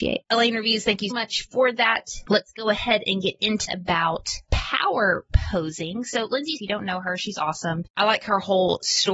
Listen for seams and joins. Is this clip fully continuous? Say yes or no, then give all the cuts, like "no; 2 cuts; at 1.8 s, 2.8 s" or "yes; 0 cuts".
no; 4 cuts; at 1.1 s, 3.7 s, 6.6 s, 7.9 s